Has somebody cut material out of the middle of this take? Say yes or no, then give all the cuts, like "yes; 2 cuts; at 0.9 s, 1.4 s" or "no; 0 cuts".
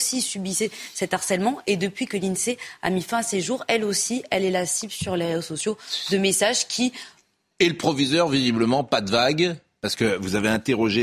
no; 0 cuts